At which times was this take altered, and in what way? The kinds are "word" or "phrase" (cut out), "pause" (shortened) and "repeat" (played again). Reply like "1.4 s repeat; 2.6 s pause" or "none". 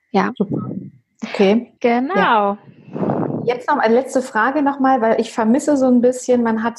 1.8 s pause